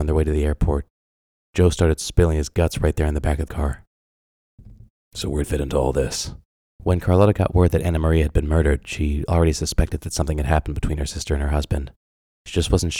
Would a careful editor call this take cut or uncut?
cut